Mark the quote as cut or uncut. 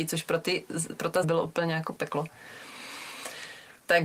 cut